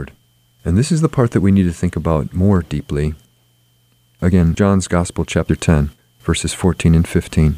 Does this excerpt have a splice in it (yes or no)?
yes